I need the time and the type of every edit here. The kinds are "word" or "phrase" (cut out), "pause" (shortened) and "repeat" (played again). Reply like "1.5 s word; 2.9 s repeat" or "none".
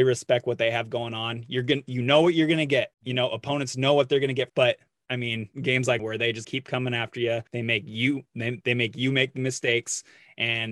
2.9 s pause; 4.5 s phrase; 5.5 s pause; 6.0 s phrase; 6.4 s word; 7.5 s pause